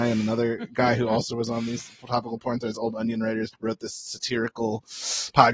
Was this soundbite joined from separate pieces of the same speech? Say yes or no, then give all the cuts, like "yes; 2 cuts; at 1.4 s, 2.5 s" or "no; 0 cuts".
yes; 1 cut; at 3.5 s